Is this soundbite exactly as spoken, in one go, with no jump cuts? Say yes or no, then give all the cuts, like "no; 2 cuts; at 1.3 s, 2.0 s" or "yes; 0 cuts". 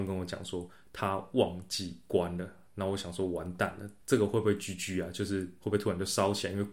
no; 1 cut; at 4.0 s